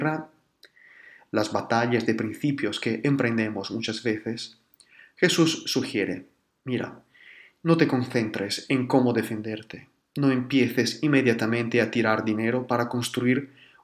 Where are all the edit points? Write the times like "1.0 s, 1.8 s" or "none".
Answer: none